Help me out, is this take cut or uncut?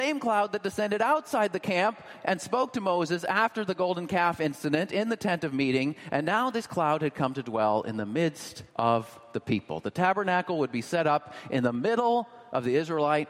cut